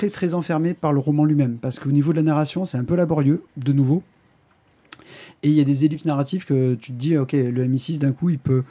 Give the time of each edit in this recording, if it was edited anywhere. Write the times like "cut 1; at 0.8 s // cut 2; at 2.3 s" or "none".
cut 1; at 3.5 s